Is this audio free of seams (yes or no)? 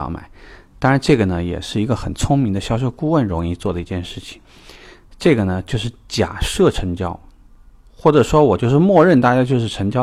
yes